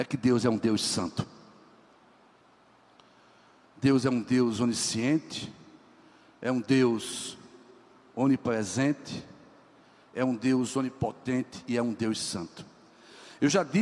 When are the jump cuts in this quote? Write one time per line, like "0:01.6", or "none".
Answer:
none